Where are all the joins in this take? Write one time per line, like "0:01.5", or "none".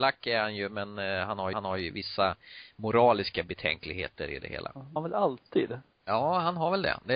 0:01.5
0:05.0
0:05.9